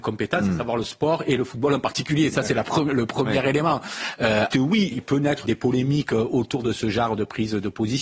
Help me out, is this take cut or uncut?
cut